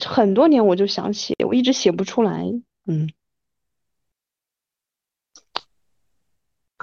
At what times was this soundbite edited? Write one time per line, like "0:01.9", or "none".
none